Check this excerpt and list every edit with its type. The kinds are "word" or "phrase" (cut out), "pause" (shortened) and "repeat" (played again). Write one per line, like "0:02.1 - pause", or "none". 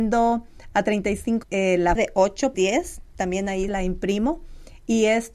0:01.4 - word
0:02.0 - word
0:02.5 - word
0:03.7 - word